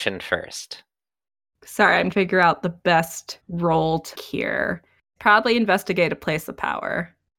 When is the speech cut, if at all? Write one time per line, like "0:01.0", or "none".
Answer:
0:02.1
0:03.4
0:04.1